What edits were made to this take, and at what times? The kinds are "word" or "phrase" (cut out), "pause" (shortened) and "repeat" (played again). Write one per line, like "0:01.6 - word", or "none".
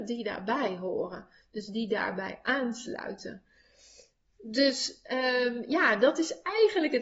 none

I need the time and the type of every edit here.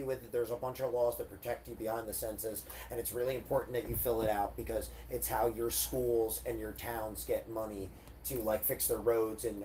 none

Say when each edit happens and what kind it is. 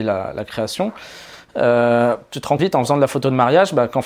0:02.6 - word

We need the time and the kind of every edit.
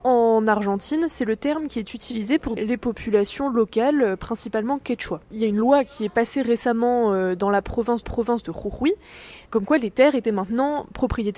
0:02.6 - word
0:05.2 - pause
0:08.0 - repeat
0:09.5 - word

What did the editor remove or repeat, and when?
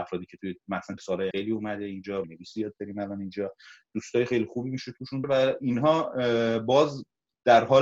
0:01.0 - word
0:01.3 - word
0:02.2 - word
0:05.2 - word

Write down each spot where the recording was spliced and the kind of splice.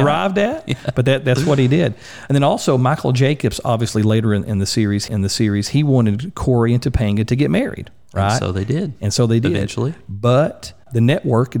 0:05.1 - repeat

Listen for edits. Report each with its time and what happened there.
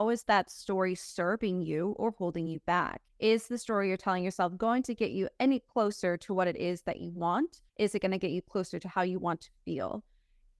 0:03.1 - pause
0:07.7 - pause

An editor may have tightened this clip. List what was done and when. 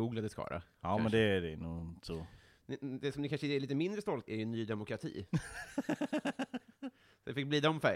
0:04.3 - word

